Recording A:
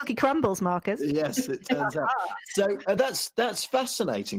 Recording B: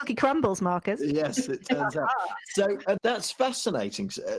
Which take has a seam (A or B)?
B